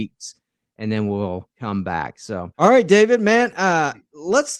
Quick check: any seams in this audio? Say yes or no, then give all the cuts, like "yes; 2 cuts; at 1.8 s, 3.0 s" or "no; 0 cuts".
yes; 1 cut; at 2.5 s